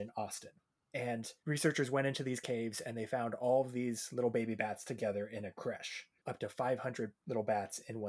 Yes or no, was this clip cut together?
yes